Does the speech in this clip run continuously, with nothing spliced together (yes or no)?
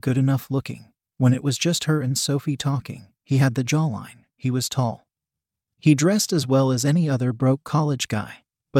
yes